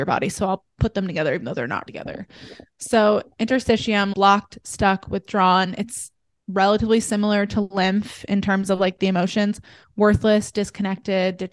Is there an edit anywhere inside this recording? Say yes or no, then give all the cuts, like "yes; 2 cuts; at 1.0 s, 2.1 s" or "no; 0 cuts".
yes; 2 cuts; at 1.9 s, 4.1 s